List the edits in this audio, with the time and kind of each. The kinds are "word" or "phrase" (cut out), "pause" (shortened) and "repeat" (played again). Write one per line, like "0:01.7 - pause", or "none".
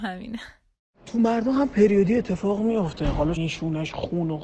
0:03.4 - word